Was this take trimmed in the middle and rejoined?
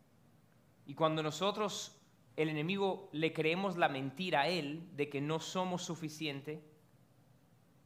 no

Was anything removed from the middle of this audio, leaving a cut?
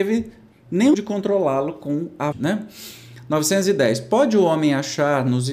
yes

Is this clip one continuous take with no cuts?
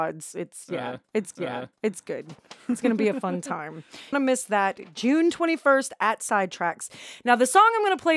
no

